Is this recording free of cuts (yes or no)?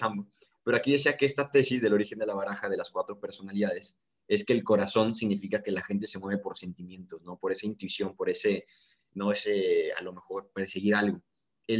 yes